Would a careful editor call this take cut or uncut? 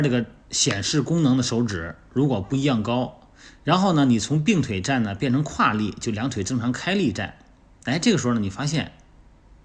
uncut